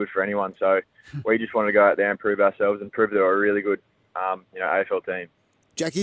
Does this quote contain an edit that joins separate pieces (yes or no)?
no